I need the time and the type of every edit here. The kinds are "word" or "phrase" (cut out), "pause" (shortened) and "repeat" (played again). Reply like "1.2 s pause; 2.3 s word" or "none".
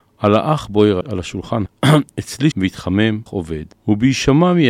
1.0 s word; 1.7 s word; 2.5 s word; 3.3 s word; 3.7 s pause